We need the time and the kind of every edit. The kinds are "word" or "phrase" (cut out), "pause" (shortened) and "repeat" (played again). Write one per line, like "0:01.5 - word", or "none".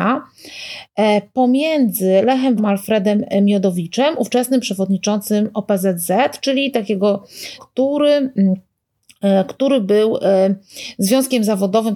0:02.6 - word
0:07.6 - phrase